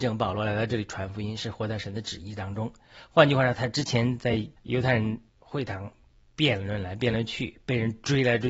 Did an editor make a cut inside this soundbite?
yes; 2 cuts; at 4.6 s, 5.3 s

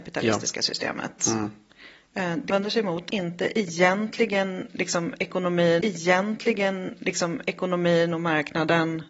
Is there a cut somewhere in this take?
yes; 3 cuts; at 2.5 s, 3.1 s, 5.8 s

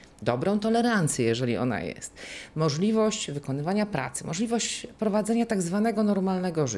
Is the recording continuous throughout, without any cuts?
yes; 0 cuts

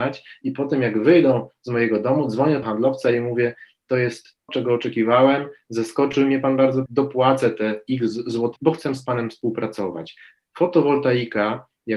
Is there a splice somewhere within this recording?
yes; 4 cuts; at 2.6 s, 4.5 s, 6.9 s, 8.6 s

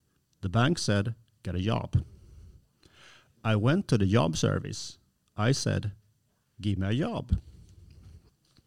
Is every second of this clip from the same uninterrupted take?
yes; 0 cuts

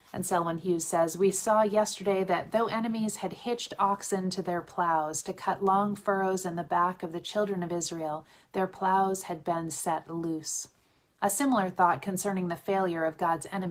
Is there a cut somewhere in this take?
no; 0 cuts

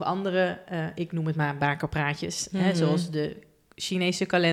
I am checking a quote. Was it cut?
no; 0 cuts

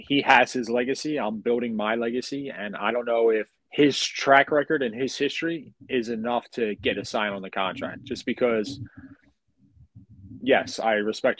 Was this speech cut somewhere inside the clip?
yes; 3 cuts; at 3.6 s, 5.8 s, 6.9 s

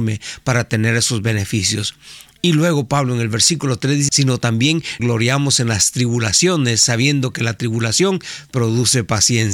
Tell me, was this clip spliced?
yes; 2 cuts; at 4.1 s, 5.0 s

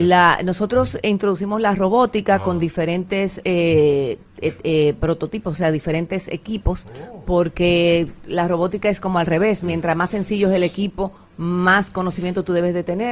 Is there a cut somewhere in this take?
no; 0 cuts

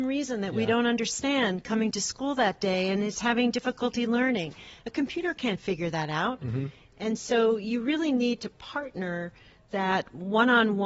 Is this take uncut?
yes; 0 cuts

